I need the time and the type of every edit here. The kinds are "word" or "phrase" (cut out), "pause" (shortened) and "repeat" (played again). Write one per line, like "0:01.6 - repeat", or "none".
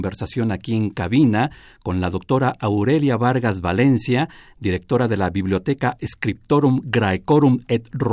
none